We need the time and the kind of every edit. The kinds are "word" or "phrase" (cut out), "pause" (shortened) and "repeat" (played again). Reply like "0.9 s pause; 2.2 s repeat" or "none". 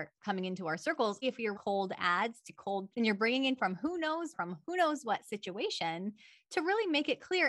1.2 s word; 1.5 s word; 2.9 s word; 3.6 s word; 4.3 s word